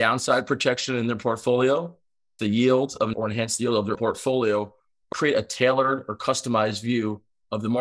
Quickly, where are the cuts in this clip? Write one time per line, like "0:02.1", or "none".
0:02.4
0:03.1
0:03.9
0:05.1